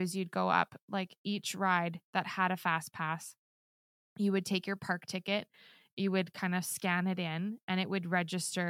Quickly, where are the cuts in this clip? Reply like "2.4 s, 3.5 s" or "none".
none